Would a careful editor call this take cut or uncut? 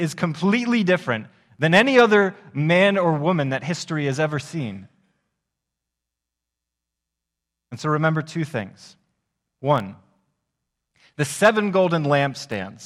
uncut